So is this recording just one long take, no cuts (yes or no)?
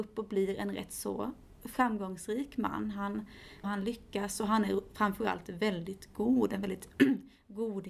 no